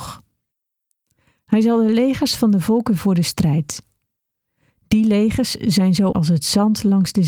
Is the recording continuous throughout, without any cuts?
no; 2 cuts; at 3.0 s, 6.1 s

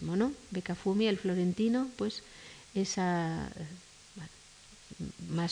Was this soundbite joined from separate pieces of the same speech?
no; 0 cuts

